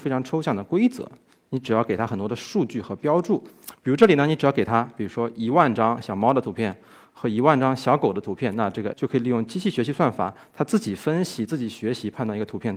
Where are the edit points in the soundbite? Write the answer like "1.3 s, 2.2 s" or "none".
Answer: 8.9 s